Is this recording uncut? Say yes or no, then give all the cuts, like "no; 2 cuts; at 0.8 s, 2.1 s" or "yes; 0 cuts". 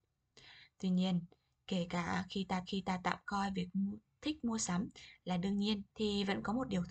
no; 2 cuts; at 2.7 s, 5.9 s